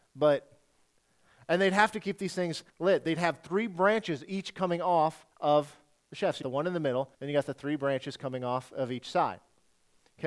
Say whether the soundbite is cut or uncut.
cut